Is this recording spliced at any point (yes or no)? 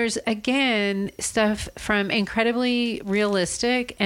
no